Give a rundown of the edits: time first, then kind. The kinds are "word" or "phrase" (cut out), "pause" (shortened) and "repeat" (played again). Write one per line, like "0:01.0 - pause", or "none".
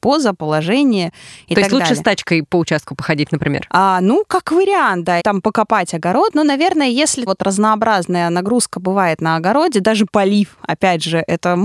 0:05.2 - word
0:07.3 - word